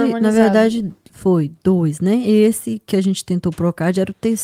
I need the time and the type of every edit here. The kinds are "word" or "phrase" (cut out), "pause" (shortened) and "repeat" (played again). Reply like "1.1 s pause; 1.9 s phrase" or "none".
none